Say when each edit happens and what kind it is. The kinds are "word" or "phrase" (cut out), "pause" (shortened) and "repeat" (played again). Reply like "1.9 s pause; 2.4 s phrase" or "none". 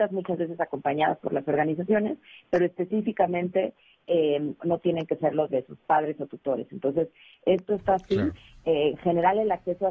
4.6 s word; 5.5 s word

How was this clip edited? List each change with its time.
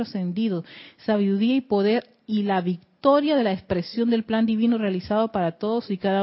none

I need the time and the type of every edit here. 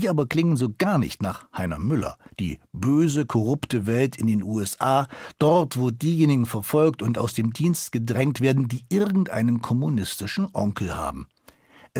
2.3 s pause

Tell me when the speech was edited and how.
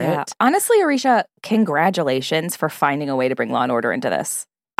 none

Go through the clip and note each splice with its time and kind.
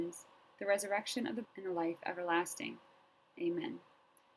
1.4 s word

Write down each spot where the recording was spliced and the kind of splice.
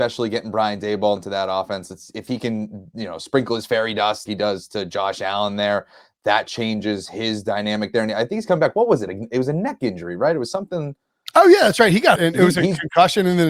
1.2 s word; 4.3 s word; 12.2 s word

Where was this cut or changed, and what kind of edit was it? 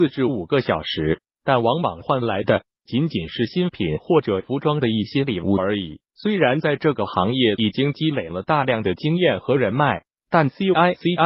6.0 s pause

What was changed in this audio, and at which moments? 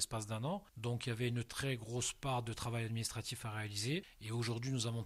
none

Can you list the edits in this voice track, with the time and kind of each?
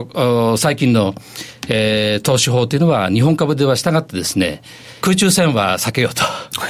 5.0 s phrase

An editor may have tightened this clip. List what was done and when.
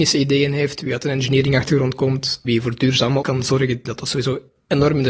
2.4 s word; 3.2 s word; 3.8 s word

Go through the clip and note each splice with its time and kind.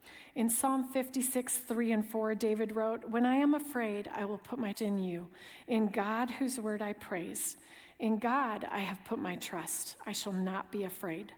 4.7 s word

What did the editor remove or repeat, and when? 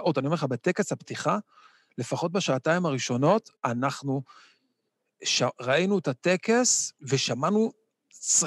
3.6 s pause; 7.0 s pause

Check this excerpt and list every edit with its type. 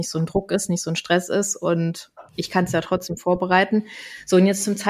2.3 s pause

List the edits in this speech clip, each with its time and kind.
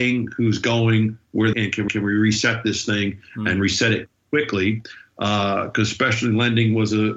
1.5 s phrase; 1.9 s repeat

